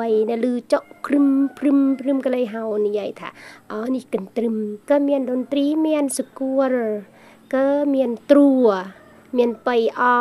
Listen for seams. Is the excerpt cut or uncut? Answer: cut